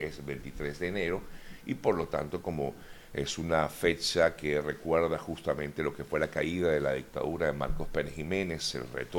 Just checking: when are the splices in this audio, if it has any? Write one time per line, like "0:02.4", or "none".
none